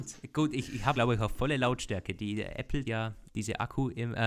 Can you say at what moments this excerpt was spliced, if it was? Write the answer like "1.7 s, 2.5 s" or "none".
0.9 s, 2.8 s, 3.3 s

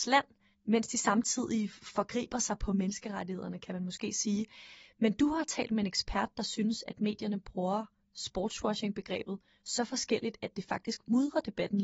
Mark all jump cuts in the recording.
none

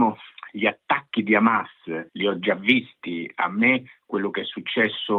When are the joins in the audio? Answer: 2.1 s

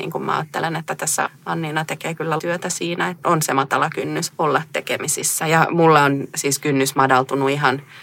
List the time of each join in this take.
1.3 s, 2.4 s, 3.2 s, 4.3 s

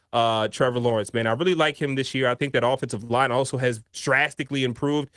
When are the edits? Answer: 3.9 s

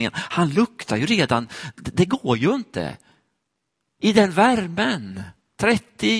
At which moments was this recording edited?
none

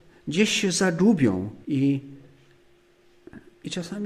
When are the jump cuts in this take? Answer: 1.6 s

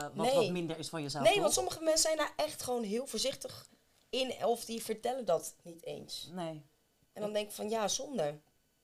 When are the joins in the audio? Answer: none

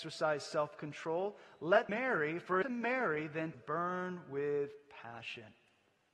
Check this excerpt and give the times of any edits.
1.9 s, 2.6 s, 3.5 s

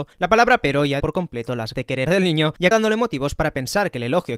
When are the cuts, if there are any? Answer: 1.0 s, 1.7 s, 2.1 s, 2.7 s

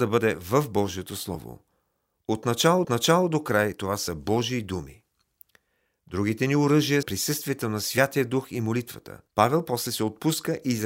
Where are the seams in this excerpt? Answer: 2.8 s, 7.0 s, 9.3 s

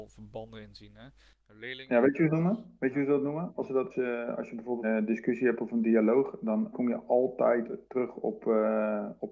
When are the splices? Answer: 2.3 s, 3.9 s, 4.8 s, 6.7 s

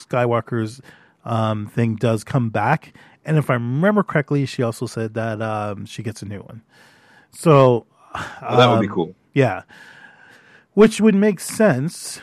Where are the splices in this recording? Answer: none

